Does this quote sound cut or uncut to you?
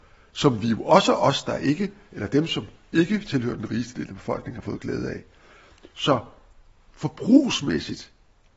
uncut